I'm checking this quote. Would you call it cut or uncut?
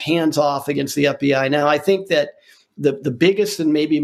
uncut